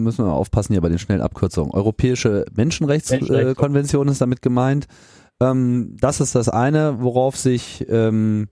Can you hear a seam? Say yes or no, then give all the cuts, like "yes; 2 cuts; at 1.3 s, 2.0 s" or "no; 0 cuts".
no; 0 cuts